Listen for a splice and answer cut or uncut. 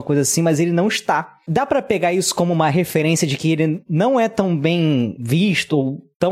uncut